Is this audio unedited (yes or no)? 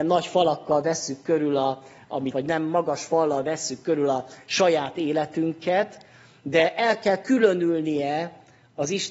no